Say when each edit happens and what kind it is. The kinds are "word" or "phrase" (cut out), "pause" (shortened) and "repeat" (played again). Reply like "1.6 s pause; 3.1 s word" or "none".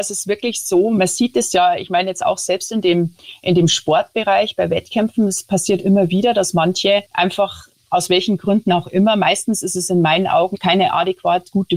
7.1 s pause